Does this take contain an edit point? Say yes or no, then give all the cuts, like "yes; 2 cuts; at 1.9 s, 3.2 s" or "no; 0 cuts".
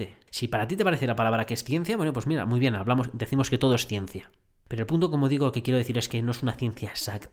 no; 0 cuts